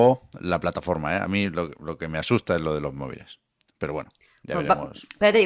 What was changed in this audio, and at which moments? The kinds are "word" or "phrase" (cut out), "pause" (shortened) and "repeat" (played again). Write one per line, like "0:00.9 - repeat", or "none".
none